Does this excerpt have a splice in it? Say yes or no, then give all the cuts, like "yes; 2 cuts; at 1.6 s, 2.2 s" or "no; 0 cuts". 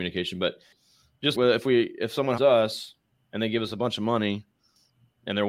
yes; 2 cuts; at 1.3 s, 2.4 s